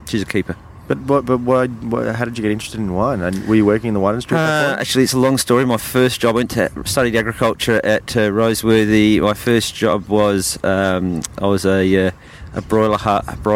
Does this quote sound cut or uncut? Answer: uncut